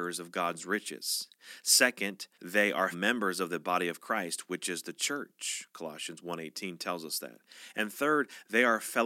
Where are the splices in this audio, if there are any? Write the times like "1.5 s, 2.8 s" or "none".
2.3 s, 2.9 s